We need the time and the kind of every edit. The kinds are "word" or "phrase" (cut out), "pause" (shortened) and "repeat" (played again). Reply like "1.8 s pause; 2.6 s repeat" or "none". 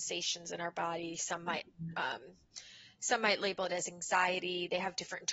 none